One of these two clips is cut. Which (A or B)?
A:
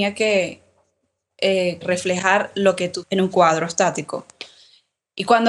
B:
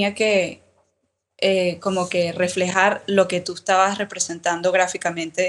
A